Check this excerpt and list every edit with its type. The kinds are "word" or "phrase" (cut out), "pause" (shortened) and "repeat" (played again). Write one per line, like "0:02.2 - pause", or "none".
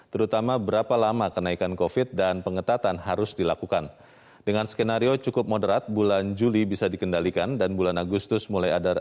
none